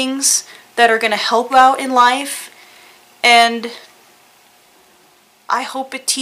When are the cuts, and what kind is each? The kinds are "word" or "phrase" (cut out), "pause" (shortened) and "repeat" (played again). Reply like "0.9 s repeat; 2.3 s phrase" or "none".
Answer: 1.5 s word

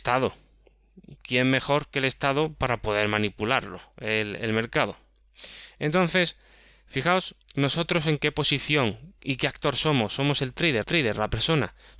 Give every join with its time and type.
7.4 s pause; 9.2 s pause; 10.8 s repeat

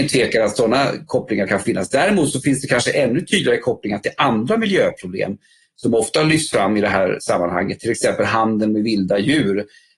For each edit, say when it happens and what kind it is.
none

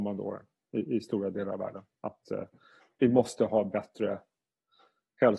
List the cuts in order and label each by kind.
none

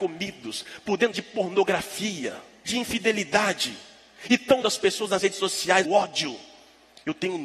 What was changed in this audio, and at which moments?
1.1 s word; 2.7 s word; 4.6 s word; 5.8 s word

